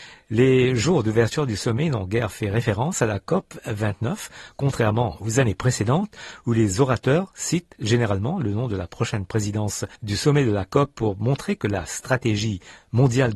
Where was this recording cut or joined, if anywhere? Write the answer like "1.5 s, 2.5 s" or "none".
10.0 s